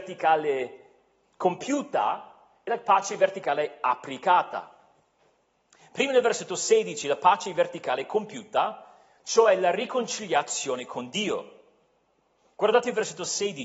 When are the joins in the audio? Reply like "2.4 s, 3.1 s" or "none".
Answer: none